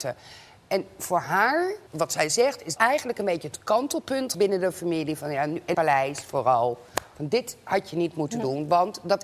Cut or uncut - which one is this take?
cut